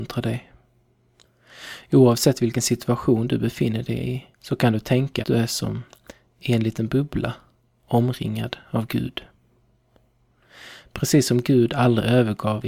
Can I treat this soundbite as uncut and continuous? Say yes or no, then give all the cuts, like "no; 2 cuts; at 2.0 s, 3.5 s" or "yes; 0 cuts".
no; 2 cuts; at 4.3 s, 5.2 s